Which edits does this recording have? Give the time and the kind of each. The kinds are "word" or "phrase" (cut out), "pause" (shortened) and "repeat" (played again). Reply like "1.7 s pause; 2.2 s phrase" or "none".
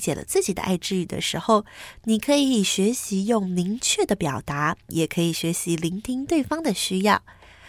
4.8 s pause